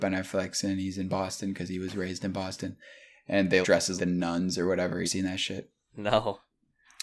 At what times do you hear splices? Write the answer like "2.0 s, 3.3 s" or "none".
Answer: 3.6 s, 4.0 s, 5.0 s

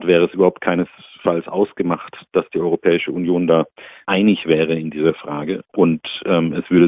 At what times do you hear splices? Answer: none

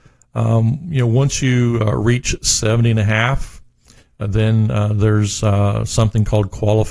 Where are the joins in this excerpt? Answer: none

